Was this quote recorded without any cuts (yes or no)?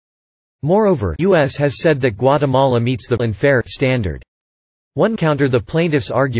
no